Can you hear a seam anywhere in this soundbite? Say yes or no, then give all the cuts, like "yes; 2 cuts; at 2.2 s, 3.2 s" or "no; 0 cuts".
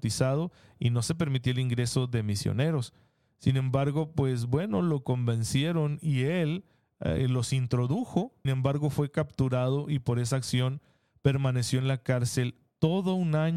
yes; 1 cut; at 8.4 s